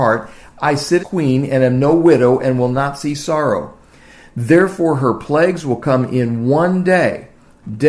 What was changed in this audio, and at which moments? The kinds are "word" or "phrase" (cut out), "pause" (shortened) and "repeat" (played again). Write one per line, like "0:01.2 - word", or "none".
0:01.0 - word